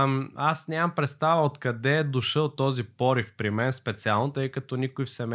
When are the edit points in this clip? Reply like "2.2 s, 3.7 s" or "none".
none